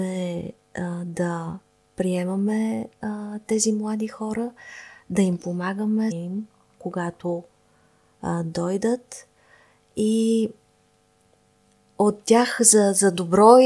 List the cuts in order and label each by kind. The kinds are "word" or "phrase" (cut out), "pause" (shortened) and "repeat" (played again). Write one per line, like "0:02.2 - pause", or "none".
0:06.1 - word